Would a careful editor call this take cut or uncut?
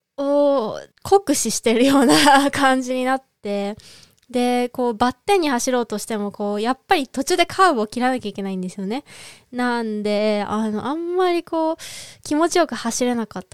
cut